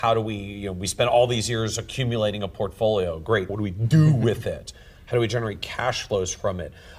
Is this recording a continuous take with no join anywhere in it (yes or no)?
no